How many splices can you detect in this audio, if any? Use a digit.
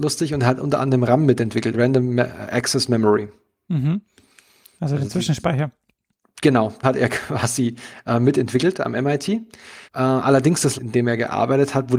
4